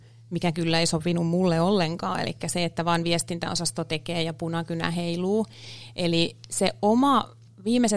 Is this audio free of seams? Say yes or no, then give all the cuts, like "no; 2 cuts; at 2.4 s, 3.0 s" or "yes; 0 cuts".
yes; 0 cuts